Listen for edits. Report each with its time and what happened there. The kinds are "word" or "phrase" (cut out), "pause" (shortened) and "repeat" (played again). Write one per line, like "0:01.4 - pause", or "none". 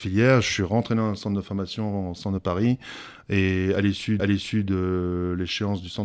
0:02.4 - phrase
0:04.2 - repeat

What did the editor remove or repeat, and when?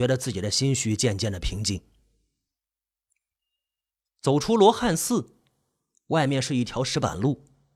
none

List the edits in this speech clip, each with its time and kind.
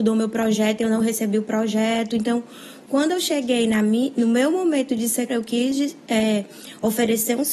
0:05.3 - word

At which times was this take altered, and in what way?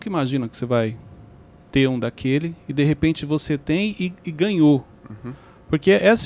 none

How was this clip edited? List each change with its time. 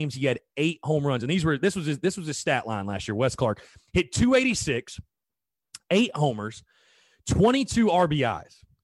none

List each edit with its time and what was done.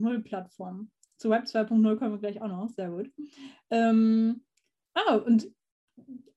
none

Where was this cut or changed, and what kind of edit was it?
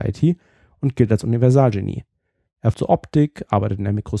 0:02.7 - word

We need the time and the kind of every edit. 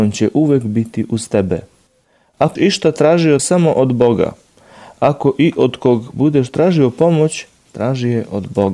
0:02.6 - word
0:03.4 - word

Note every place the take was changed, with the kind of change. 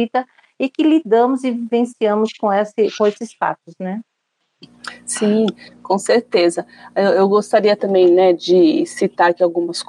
none

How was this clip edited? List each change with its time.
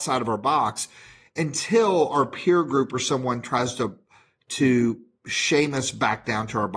none

